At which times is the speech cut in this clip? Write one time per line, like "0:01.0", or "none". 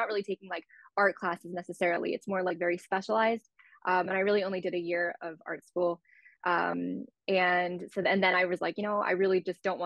none